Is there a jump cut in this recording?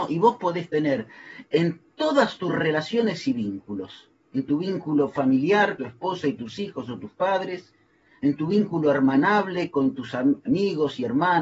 yes; 1 cut; at 5.8 s

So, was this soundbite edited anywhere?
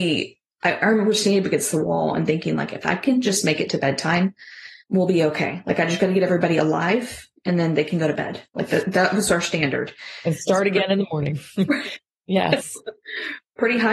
yes; 2 cuts; at 4.8 s, 8.5 s

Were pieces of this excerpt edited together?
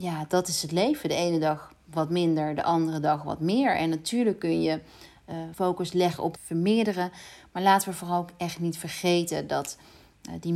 yes; 2 cuts; at 5.5 s, 6.4 s

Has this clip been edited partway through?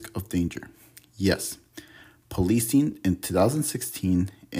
no; 0 cuts

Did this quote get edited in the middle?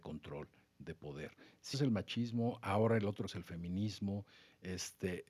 yes; 2 cuts; at 1.7 s, 3.3 s

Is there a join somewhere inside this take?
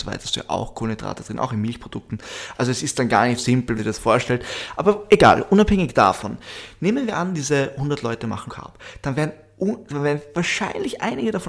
yes; 3 cuts; at 3.4 s, 3.8 s, 8.5 s

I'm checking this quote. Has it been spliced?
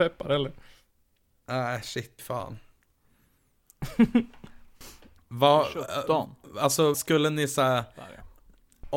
yes; 2 cuts; at 2.2 s, 6.9 s

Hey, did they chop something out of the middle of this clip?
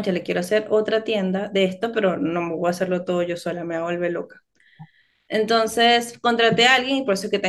no; 0 cuts

